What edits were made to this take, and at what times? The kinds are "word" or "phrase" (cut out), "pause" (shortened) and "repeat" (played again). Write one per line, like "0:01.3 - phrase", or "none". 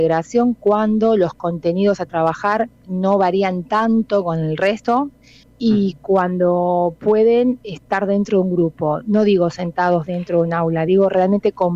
0:05.4 - pause